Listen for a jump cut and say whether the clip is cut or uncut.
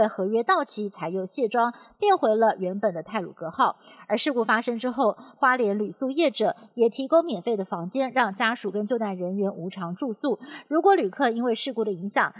uncut